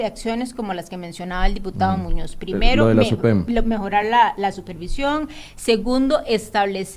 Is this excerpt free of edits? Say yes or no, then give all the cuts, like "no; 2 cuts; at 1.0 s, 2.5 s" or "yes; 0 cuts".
yes; 0 cuts